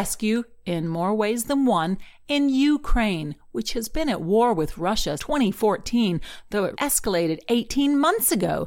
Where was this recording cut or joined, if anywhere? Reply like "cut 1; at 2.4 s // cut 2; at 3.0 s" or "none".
cut 1; at 5.2 s // cut 2; at 6.7 s